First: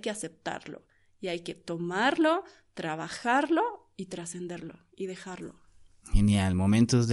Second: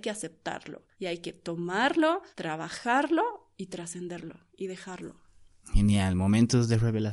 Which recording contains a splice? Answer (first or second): second